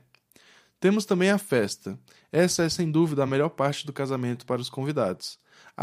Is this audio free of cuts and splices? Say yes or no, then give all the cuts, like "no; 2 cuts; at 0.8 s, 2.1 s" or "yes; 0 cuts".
yes; 0 cuts